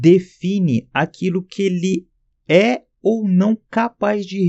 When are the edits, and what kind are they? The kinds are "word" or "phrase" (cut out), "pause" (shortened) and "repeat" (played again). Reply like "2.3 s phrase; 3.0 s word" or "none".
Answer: none